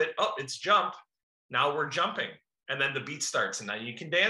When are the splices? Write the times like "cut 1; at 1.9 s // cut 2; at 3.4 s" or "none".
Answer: none